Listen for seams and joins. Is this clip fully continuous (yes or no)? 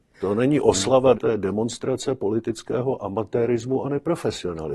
no